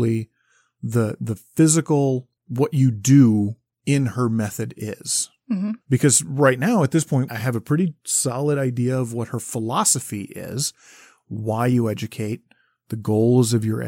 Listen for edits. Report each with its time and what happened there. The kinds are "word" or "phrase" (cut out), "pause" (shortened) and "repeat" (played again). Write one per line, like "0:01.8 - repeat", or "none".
0:02.4 - pause
0:03.7 - pause
0:05.8 - pause
0:07.3 - phrase